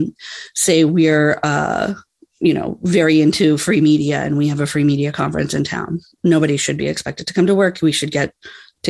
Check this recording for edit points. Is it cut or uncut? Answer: uncut